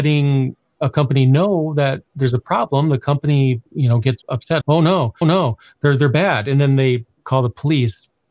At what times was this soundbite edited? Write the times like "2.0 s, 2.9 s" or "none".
2.1 s, 3.7 s, 4.2 s, 4.6 s, 5.2 s